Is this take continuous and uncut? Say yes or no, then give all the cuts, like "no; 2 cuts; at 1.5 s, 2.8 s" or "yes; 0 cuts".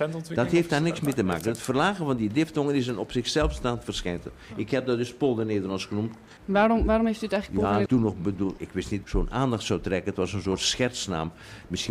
no; 4 cuts; at 6.4 s, 7.9 s, 8.6 s, 9.0 s